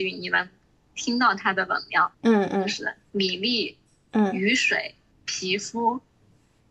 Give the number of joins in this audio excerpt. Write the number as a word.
two